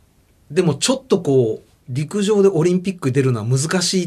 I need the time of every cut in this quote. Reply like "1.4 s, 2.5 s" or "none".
1.8 s